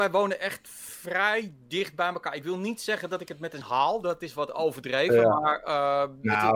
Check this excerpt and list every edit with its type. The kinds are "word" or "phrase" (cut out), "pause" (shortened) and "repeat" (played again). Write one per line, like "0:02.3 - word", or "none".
0:03.6 - word